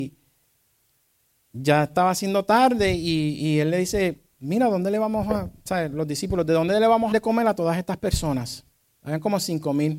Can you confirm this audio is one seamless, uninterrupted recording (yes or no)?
no